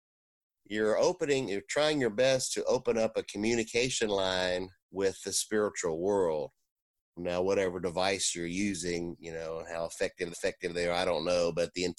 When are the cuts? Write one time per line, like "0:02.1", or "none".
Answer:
0:04.8
0:07.2
0:10.3